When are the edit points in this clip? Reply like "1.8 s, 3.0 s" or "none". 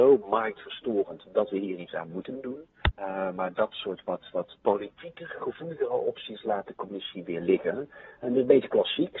2.9 s